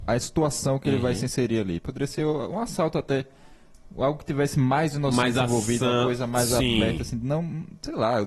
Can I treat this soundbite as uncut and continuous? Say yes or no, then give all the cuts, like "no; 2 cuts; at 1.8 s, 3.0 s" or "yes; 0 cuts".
yes; 0 cuts